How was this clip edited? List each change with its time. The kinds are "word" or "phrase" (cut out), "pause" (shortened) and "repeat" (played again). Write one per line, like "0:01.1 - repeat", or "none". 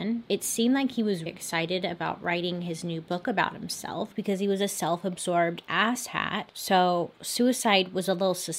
0:01.3 - word